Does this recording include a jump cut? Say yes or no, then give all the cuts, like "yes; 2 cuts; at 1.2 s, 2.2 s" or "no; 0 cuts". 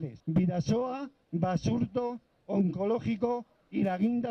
yes; 1 cut; at 2.3 s